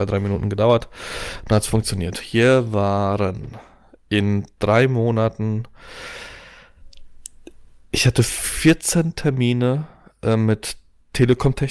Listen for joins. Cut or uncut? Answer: uncut